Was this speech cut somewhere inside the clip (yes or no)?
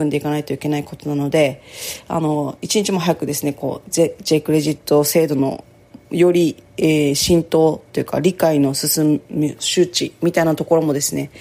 yes